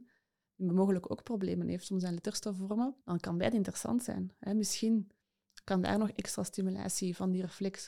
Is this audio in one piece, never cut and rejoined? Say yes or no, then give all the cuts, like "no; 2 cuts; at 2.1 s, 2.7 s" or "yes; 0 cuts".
no; 1 cut; at 3.0 s